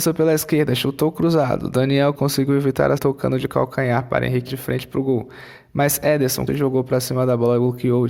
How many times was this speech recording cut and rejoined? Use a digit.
4